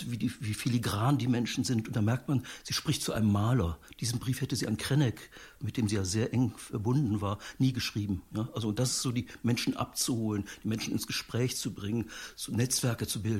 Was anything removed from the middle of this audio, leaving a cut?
no; 0 cuts

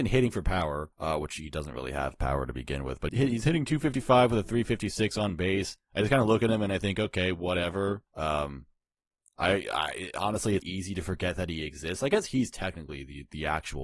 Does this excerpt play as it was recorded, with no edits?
no; 4 cuts; at 0.9 s, 3.1 s, 8.1 s, 10.6 s

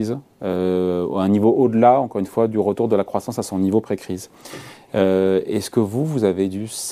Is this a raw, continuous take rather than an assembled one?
yes; 0 cuts

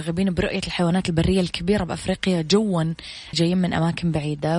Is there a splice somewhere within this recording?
yes; 1 cut; at 3.3 s

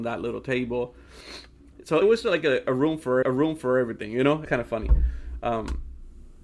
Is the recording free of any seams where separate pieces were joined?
no; 3 cuts; at 2.0 s, 3.2 s, 4.5 s

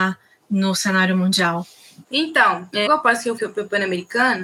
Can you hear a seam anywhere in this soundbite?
yes; 2 cuts; at 2.9 s, 3.4 s

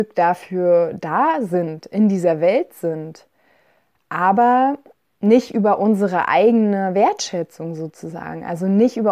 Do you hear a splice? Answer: no; 0 cuts

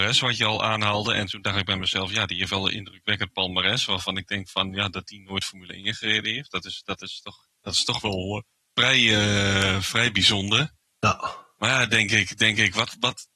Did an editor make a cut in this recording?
no; 0 cuts

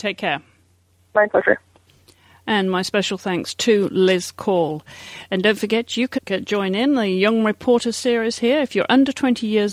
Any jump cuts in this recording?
yes; 1 cut; at 6.2 s

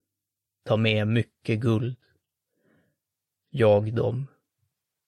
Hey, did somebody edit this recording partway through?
no; 0 cuts

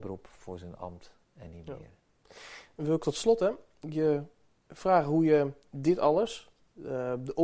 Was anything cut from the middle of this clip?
no; 0 cuts

